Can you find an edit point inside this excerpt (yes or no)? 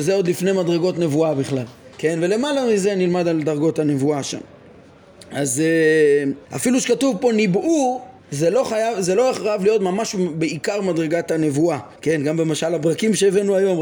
yes